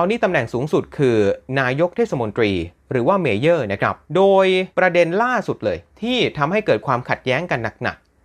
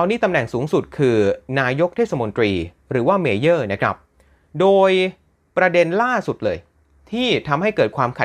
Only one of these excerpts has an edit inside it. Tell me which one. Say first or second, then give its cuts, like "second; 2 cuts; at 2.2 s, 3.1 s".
first; 3 cuts; at 4.1 s, 4.7 s, 5.9 s